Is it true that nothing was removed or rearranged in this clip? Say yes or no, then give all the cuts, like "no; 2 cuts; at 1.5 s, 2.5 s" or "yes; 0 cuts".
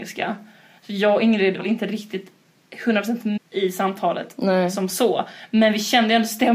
no; 2 cuts; at 1.6 s, 3.4 s